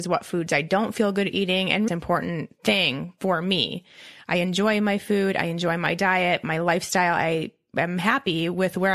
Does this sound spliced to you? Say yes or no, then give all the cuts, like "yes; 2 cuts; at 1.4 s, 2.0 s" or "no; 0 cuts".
yes; 1 cut; at 1.9 s